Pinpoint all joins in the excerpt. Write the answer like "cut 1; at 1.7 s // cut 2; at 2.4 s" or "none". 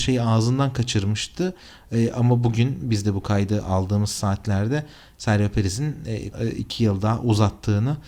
cut 1; at 6.3 s